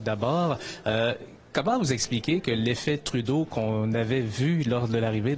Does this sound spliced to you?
no; 0 cuts

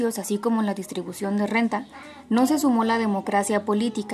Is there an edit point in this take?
no; 0 cuts

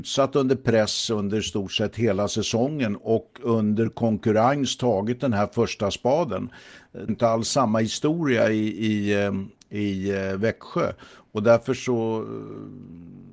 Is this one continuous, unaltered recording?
no; 1 cut; at 7.1 s

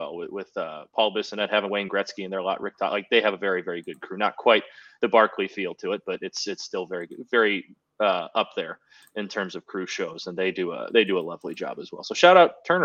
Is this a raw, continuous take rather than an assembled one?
yes; 0 cuts

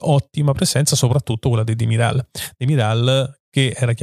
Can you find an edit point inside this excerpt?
no; 0 cuts

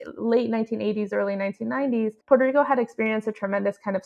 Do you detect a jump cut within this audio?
yes; 1 cut; at 2.2 s

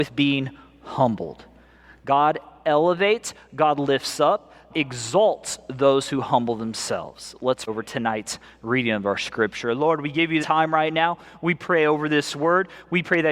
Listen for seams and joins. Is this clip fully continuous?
no; 3 cuts; at 4.7 s, 7.7 s, 10.4 s

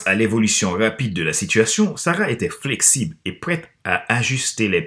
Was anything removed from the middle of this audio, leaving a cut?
no; 0 cuts

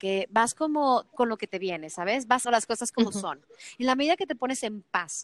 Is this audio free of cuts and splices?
no; 2 cuts; at 1.1 s, 2.4 s

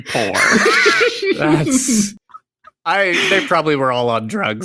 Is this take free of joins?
yes; 0 cuts

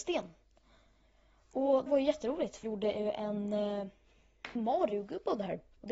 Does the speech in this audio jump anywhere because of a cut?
yes; 3 cuts; at 1.9 s, 2.6 s, 4.6 s

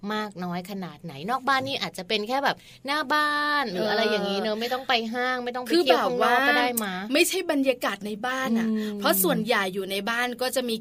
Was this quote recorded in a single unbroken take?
yes; 0 cuts

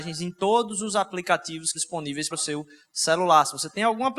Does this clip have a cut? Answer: yes; 2 cuts; at 1.7 s, 2.3 s

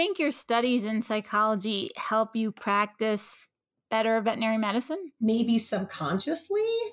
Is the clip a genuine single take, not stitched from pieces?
yes; 0 cuts

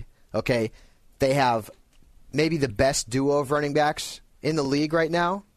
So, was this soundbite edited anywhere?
no; 0 cuts

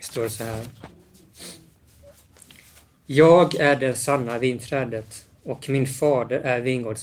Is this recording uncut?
yes; 0 cuts

